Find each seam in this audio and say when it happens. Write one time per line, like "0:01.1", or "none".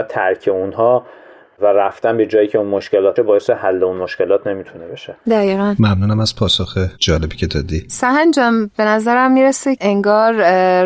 0:03.2
0:09.8